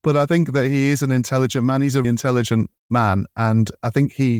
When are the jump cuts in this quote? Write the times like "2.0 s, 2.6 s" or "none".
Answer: 2.0 s, 2.8 s